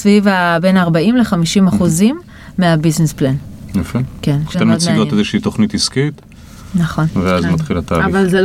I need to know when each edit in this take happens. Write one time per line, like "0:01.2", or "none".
0:04.5